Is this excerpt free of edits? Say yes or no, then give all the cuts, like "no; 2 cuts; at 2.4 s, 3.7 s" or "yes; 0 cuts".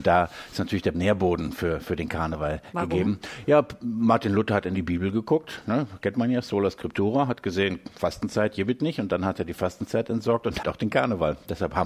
no; 2 cuts; at 0.9 s, 10.6 s